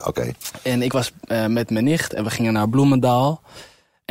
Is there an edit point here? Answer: no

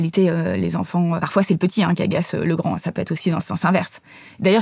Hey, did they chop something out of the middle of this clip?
yes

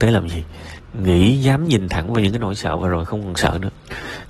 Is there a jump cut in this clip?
no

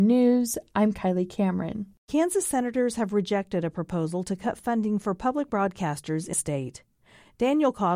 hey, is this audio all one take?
no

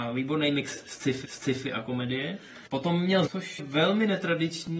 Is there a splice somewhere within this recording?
yes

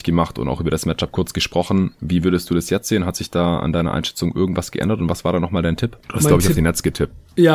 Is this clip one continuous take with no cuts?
yes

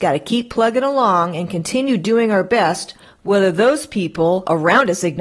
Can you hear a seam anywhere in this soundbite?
no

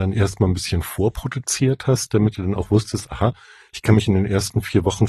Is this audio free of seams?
yes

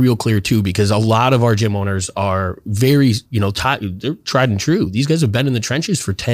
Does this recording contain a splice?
no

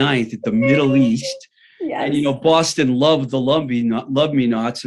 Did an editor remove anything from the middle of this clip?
no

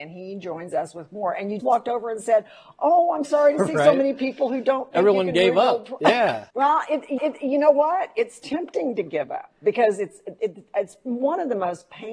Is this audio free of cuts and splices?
no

